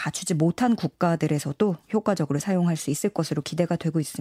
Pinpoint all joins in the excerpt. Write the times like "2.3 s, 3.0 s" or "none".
none

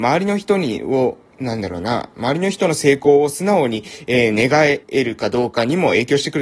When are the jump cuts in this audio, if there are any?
4.8 s

